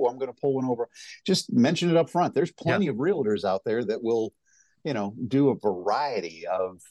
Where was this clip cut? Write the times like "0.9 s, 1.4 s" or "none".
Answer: none